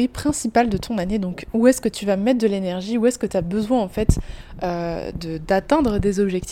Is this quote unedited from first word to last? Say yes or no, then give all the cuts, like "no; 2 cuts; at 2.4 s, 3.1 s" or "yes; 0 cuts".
yes; 0 cuts